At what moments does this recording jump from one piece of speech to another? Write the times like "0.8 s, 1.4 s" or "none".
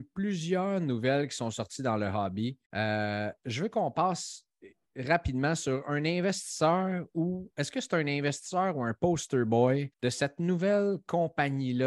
2.7 s, 9.9 s